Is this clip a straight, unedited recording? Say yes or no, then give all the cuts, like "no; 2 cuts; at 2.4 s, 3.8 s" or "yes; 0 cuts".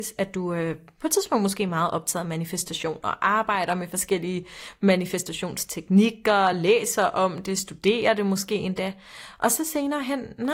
yes; 0 cuts